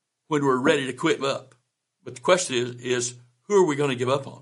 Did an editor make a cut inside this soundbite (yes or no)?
yes